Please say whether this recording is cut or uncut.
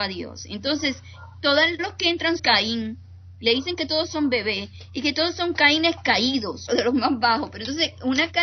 cut